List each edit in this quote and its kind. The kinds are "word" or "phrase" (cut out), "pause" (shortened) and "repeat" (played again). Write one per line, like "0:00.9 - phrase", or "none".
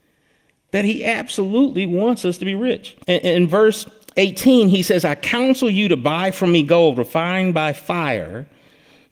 0:03.0 - pause